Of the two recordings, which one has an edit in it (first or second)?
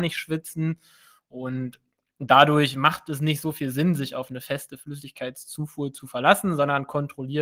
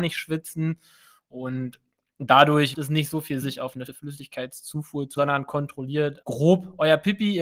second